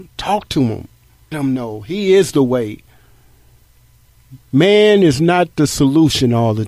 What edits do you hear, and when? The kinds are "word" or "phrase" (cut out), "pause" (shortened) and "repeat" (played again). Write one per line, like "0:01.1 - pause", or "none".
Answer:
0:01.3 - word
0:04.4 - pause

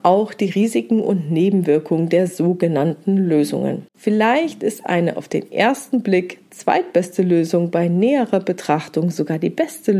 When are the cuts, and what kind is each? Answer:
0:03.9 - pause

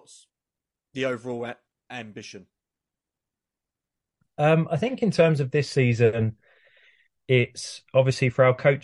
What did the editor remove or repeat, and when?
none

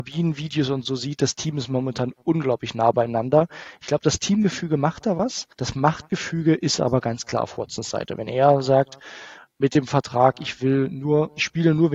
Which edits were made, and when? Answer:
0:05.5 - pause

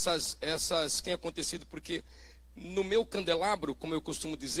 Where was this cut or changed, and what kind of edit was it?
0:01.0 - word

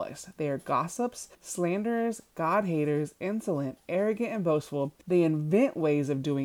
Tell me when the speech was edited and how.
0:01.3 - pause
0:05.0 - pause

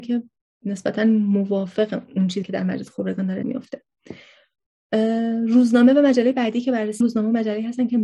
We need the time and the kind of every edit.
0:02.4 - word
0:03.4 - word
0:07.0 - word

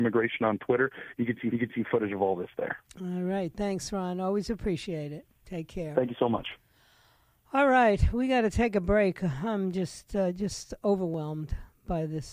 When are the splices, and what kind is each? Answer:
0:01.5 - repeat

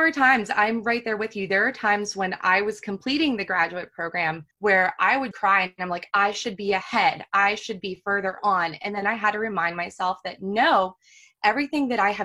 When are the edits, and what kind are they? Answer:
0:04.5 - pause
0:05.3 - word

